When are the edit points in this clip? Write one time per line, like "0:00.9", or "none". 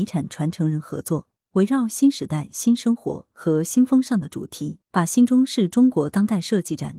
0:04.8

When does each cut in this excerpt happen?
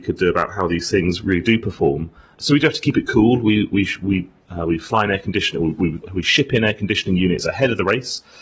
none

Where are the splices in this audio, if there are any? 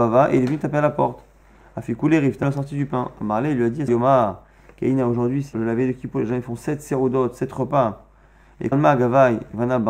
0:02.4
0:03.9
0:05.5
0:08.7

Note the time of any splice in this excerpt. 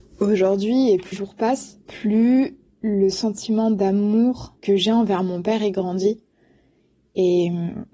0:01.1
0:01.8
0:04.6

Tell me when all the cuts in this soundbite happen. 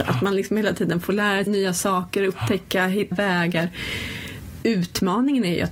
0:01.5
0:03.1

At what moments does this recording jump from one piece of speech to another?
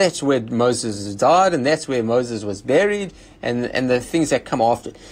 none

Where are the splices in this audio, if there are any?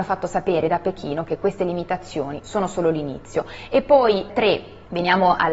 none

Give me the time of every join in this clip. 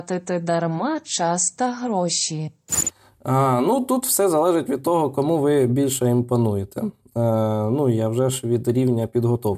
none

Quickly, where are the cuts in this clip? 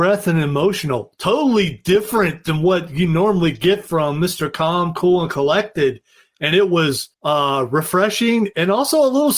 0:07.1

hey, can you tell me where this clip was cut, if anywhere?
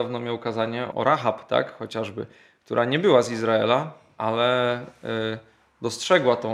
0:00.9

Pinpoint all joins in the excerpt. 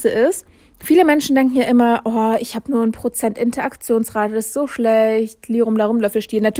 none

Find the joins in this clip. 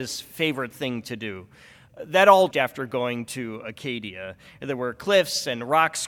0:02.5

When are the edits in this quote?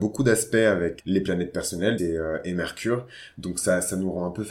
0:01.0
0:02.0

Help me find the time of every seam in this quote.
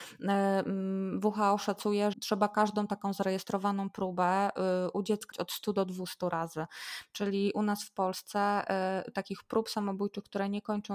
0:02.1
0:05.3

